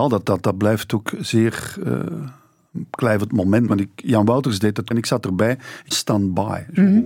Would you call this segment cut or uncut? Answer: cut